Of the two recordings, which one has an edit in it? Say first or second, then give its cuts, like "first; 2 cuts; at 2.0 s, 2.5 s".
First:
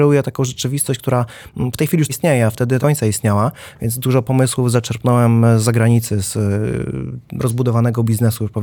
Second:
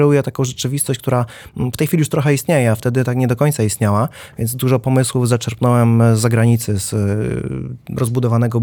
first; 2 cuts; at 2.1 s, 2.8 s